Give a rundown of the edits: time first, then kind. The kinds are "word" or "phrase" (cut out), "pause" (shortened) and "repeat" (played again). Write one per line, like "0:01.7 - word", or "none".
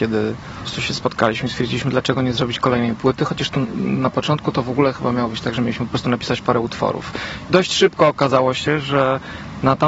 none